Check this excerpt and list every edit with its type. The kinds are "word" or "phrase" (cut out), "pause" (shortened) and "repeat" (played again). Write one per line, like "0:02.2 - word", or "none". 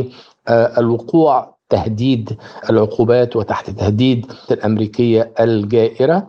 0:01.6 - word
0:04.5 - word